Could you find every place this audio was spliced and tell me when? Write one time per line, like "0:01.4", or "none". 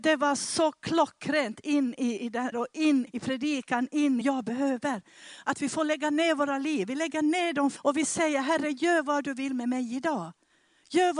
0:02.5
0:03.1
0:04.2
0:07.8